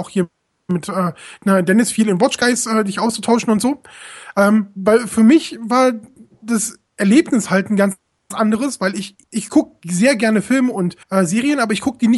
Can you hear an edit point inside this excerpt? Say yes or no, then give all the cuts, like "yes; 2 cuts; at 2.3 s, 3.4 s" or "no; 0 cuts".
yes; 2 cuts; at 9.2 s, 11.0 s